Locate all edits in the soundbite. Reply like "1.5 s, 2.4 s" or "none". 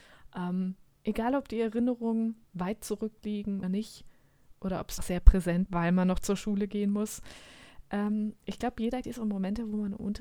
1.0 s, 2.4 s, 3.6 s, 5.0 s, 5.7 s, 9.0 s